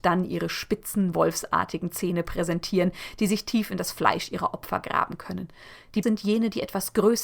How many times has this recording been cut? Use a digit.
1